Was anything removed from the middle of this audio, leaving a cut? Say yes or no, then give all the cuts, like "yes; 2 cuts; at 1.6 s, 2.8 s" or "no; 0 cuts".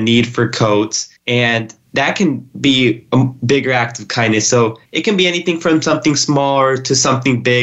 yes; 2 cuts; at 1.2 s, 4.9 s